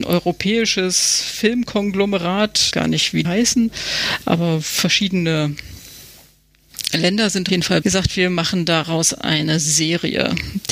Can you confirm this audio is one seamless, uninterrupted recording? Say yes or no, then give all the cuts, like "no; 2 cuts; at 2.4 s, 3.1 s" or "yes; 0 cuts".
no; 4 cuts; at 2.7 s, 3.2 s, 7.5 s, 7.8 s